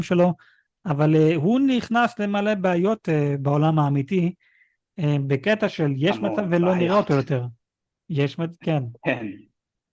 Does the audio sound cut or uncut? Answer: uncut